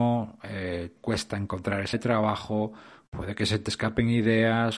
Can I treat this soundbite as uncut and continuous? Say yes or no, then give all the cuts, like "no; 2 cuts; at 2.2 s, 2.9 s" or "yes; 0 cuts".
no; 2 cuts; at 1.0 s, 1.9 s